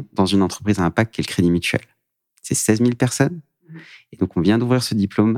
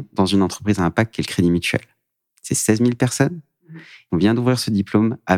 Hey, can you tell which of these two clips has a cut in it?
second; 1 cut; at 4.1 s

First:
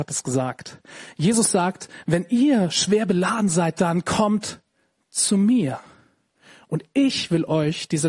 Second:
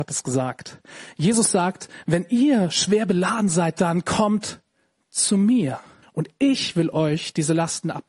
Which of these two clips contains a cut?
second; 1 cut; at 6.0 s

